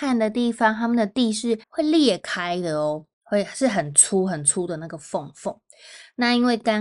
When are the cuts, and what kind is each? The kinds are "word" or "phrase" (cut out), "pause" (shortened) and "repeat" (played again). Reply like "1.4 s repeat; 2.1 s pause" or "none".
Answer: 1.6 s pause; 3.1 s pause